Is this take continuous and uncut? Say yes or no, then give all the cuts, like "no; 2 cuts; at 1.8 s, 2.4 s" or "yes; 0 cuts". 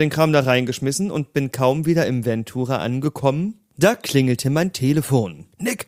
yes; 0 cuts